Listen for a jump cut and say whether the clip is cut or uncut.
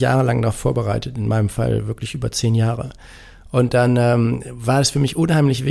uncut